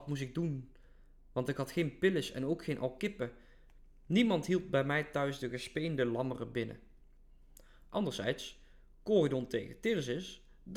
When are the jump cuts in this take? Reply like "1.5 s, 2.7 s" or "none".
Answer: none

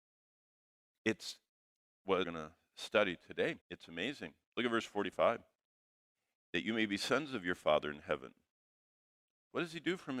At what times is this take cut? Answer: 2.2 s, 3.6 s, 6.1 s

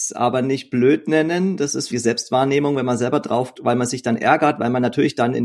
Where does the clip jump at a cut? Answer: 1.9 s, 3.6 s

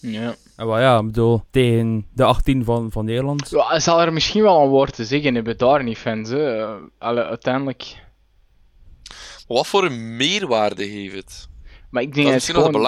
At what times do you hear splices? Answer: 1.5 s

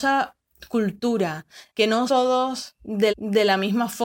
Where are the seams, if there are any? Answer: 1.7 s, 2.1 s, 3.1 s

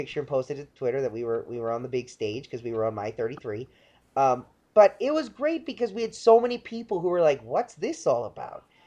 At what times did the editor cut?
none

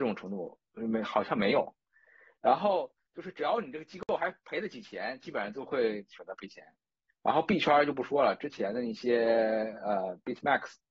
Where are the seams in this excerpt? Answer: none

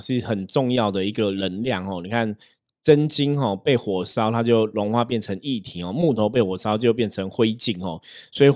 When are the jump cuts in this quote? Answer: none

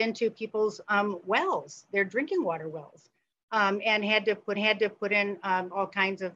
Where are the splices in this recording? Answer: 4.6 s

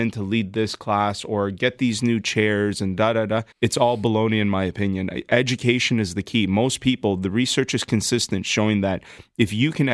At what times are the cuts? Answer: 3.5 s

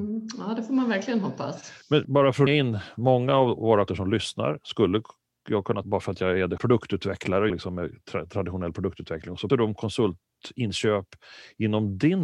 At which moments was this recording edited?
2.0 s, 2.5 s, 3.9 s, 5.8 s, 6.6 s, 7.5 s, 9.5 s

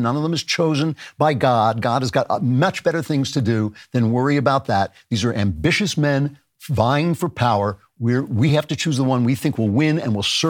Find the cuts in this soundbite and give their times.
none

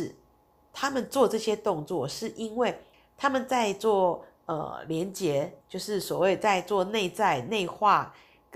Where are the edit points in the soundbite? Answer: 2.9 s, 5.6 s

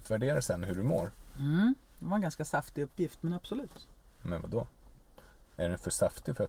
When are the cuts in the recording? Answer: none

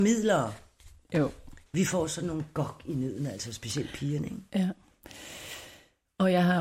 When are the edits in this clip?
1.7 s

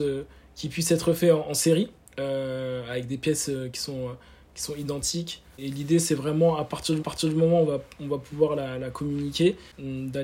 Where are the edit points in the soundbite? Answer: 1.9 s, 7.0 s

